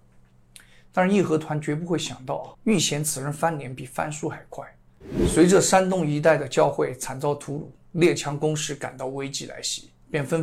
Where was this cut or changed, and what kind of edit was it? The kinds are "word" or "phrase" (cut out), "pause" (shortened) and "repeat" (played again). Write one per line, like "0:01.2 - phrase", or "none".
0:02.5 - pause